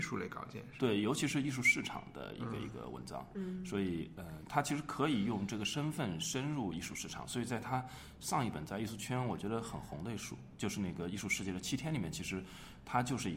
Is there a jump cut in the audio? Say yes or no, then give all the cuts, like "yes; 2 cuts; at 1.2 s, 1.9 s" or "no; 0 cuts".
no; 0 cuts